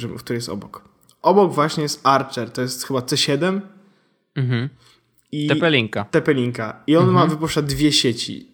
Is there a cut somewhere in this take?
no; 0 cuts

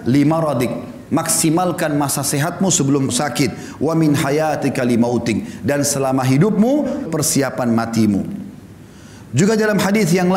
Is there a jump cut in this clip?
yes; 2 cuts; at 3.1 s, 7.1 s

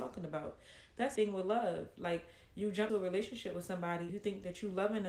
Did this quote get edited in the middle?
yes; 3 cuts; at 1.2 s, 2.9 s, 4.1 s

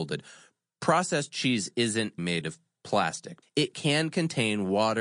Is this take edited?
yes; 2 cuts; at 2.2 s, 3.4 s

